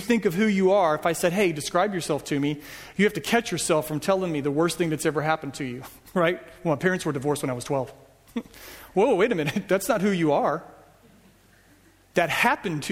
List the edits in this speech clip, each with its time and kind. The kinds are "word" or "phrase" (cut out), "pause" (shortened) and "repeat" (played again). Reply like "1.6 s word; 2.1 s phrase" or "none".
none